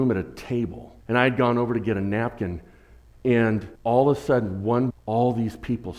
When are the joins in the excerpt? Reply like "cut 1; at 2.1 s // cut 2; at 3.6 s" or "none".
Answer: cut 1; at 1.0 s // cut 2; at 3.7 s // cut 3; at 4.9 s